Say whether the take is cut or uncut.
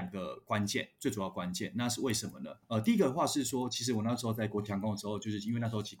cut